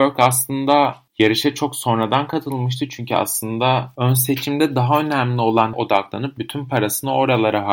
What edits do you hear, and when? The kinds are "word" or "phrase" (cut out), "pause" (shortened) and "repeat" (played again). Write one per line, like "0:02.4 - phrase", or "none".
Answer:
0:01.1 - pause
0:05.7 - word